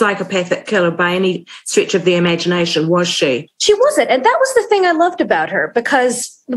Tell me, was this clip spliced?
no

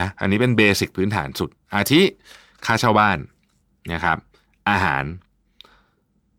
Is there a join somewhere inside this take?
no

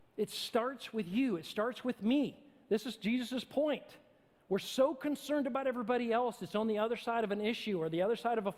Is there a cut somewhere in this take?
no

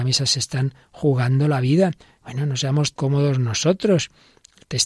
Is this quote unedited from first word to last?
no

